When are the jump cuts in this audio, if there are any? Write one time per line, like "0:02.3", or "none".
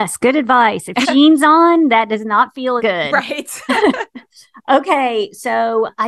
0:01.0
0:02.8